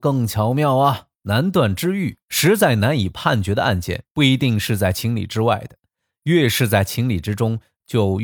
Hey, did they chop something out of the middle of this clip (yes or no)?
yes